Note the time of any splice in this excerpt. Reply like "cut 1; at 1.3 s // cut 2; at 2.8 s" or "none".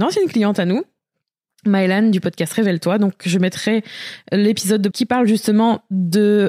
cut 1; at 4.9 s